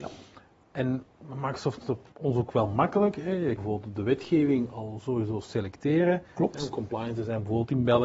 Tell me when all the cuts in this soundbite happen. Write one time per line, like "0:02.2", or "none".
0:01.8
0:02.1
0:03.6